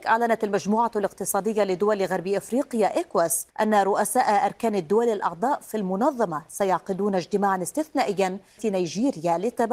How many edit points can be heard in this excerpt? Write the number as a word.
two